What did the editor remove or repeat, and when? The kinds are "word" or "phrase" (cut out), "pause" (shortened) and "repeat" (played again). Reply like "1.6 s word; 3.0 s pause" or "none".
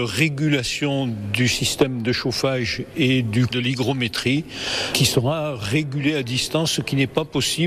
3.5 s word

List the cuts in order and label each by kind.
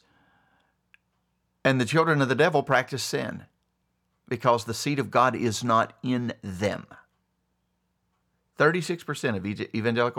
none

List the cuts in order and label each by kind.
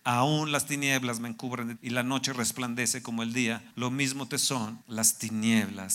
1.8 s word; 3.7 s pause; 4.8 s pause

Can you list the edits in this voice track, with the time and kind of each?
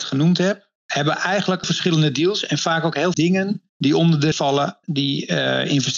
1.6 s phrase; 3.1 s word; 3.7 s pause; 4.3 s word; 4.8 s word

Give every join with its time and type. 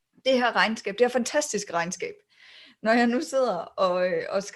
none

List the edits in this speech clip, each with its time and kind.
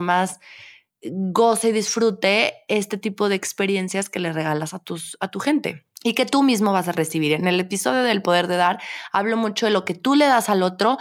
6.0 s pause

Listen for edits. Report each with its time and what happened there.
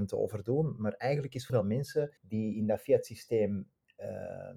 1.5 s word; 2.2 s pause

